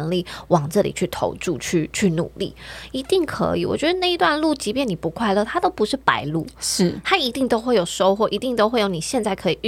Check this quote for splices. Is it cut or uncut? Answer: uncut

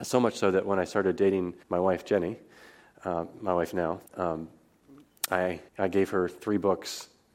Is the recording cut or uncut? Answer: cut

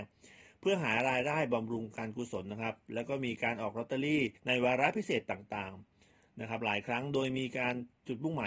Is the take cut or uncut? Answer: cut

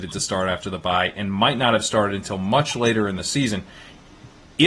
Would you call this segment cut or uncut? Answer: uncut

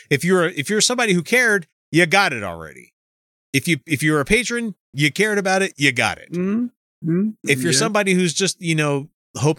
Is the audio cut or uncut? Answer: uncut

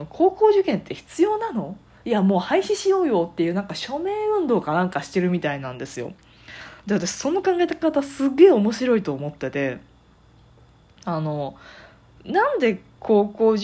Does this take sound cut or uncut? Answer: uncut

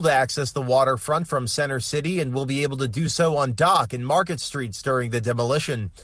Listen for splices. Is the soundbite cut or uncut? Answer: uncut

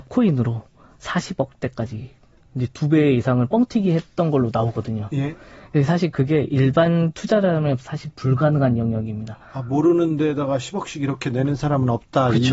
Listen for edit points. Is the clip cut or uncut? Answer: uncut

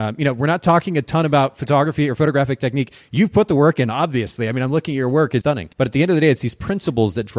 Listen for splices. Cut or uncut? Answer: cut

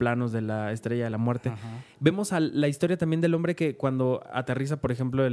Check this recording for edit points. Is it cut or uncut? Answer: uncut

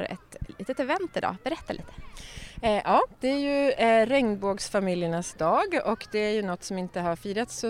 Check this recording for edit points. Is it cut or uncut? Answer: uncut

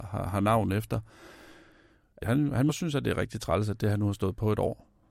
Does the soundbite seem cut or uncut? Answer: cut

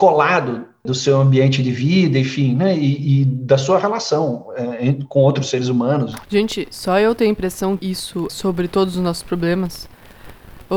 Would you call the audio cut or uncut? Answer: cut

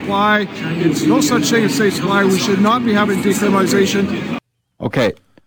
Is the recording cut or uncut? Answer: uncut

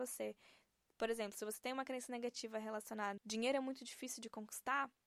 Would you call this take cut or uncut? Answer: cut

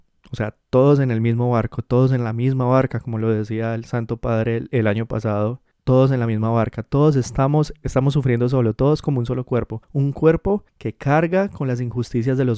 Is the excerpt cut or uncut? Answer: cut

